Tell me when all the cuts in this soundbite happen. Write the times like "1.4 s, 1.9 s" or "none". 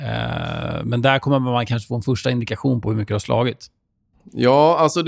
none